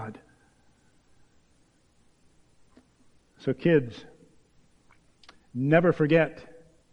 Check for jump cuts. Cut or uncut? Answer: uncut